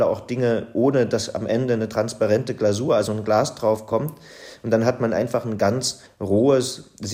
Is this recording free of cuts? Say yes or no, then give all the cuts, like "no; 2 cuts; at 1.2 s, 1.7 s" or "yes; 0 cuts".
yes; 0 cuts